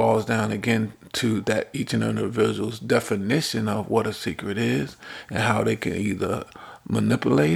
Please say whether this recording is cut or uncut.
uncut